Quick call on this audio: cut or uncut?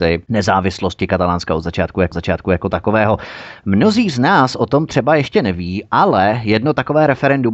cut